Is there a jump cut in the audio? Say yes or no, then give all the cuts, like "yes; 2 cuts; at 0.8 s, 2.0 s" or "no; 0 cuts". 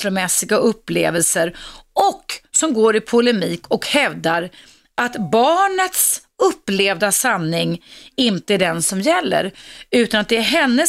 no; 0 cuts